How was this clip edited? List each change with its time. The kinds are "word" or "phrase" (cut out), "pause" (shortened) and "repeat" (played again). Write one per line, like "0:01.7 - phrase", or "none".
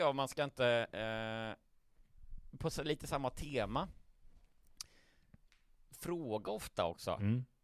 none